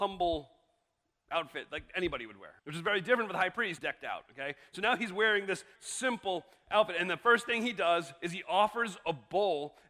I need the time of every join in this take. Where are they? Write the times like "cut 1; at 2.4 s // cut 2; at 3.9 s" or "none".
cut 1; at 2.6 s // cut 2; at 3.8 s // cut 3; at 5.8 s

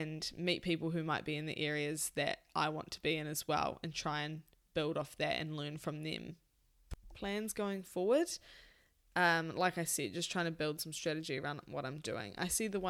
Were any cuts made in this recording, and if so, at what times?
none

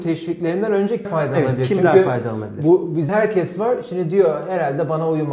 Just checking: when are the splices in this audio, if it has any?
cut 1; at 1.0 s // cut 2; at 3.1 s

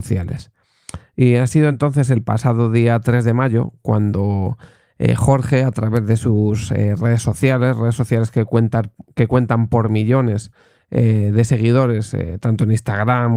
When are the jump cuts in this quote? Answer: none

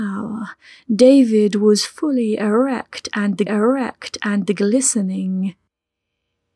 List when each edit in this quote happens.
cut 1; at 3.5 s

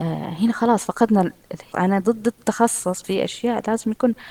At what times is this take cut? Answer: cut 1; at 1.7 s // cut 2; at 3.0 s

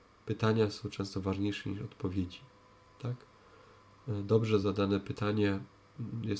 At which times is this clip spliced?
none

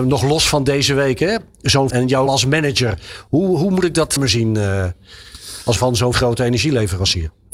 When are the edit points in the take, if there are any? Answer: cut 1; at 1.9 s // cut 2; at 2.3 s // cut 3; at 4.2 s // cut 4; at 5.8 s // cut 5; at 6.1 s

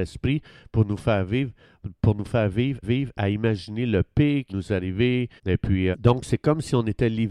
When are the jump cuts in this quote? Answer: cut 1; at 2.8 s // cut 2; at 4.5 s // cut 3; at 5.4 s // cut 4; at 5.9 s

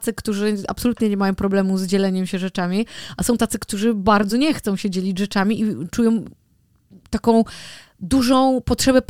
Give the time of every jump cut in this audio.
none

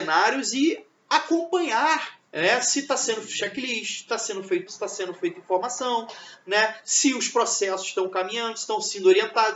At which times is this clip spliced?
cut 1; at 2.3 s // cut 2; at 4.7 s

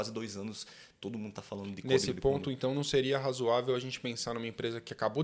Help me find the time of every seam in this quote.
none

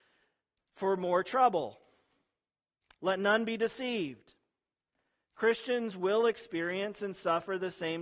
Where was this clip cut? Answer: none

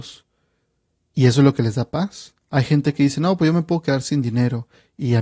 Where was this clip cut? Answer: cut 1; at 2.4 s

